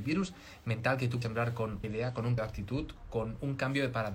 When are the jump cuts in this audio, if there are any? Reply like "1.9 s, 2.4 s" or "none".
1.2 s, 1.8 s, 2.4 s